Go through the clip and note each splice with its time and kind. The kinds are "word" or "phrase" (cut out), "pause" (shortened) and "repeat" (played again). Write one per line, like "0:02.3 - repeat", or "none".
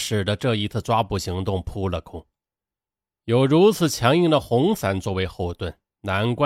none